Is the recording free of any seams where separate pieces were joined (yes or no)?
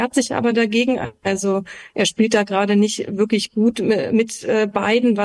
yes